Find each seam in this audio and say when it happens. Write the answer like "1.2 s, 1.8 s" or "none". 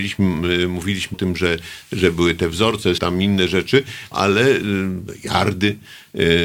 1.1 s, 3.0 s, 4.1 s